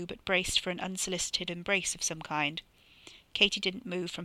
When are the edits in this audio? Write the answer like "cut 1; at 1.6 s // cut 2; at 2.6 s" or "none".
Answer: cut 1; at 1.5 s